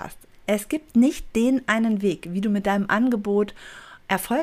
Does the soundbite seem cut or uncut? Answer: uncut